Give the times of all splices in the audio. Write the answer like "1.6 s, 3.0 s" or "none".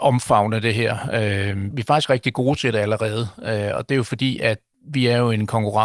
1.7 s, 3.9 s